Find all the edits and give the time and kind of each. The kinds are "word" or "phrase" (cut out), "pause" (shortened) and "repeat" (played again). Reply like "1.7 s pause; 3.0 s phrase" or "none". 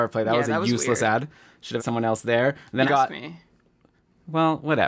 1.8 s word; 2.9 s word